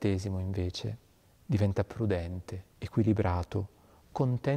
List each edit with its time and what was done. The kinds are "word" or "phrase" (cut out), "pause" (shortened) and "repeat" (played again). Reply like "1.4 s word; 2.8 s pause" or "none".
2.7 s pause